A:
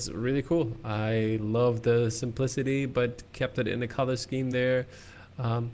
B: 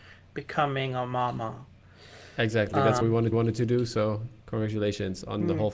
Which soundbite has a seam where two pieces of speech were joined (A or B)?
B